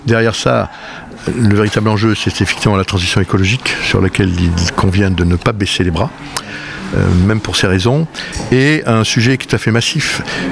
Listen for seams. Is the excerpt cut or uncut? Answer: uncut